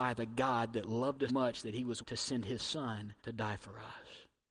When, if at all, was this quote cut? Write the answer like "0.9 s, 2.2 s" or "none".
1.3 s, 2.0 s, 3.2 s